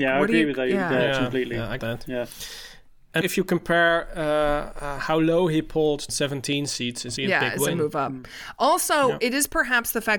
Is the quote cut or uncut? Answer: cut